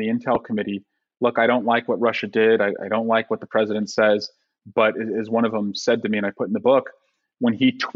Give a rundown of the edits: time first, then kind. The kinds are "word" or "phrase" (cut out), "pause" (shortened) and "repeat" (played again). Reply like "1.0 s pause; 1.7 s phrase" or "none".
none